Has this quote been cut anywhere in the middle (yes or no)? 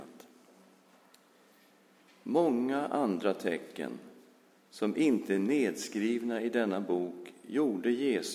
no